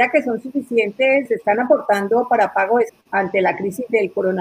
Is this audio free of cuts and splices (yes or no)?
no